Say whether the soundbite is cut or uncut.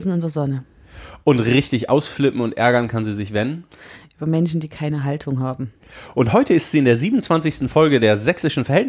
uncut